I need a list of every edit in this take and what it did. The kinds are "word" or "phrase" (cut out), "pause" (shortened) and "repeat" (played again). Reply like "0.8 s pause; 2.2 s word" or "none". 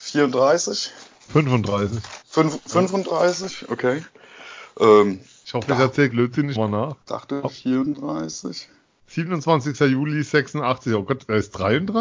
2.2 s pause; 6.1 s word; 6.5 s word; 7.0 s pause; 8.8 s pause